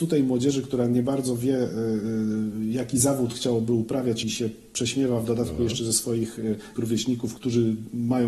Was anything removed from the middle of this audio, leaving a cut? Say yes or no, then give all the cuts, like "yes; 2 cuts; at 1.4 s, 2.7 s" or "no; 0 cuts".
yes; 3 cuts; at 4.2 s, 6.8 s, 7.4 s